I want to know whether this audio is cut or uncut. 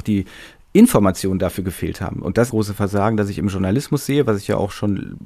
cut